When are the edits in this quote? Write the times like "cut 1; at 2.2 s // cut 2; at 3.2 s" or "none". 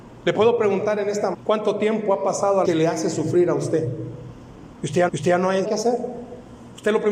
cut 1; at 1.3 s // cut 2; at 2.6 s // cut 3; at 5.1 s // cut 4; at 5.6 s